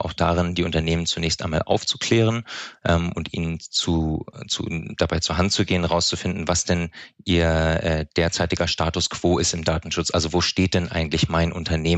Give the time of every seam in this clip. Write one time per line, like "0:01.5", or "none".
none